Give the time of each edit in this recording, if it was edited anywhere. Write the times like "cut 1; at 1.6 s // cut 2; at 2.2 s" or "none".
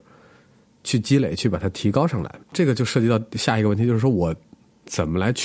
cut 1; at 2.4 s